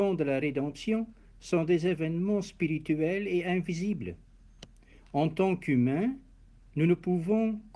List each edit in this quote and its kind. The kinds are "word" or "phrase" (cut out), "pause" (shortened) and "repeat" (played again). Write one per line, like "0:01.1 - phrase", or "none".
none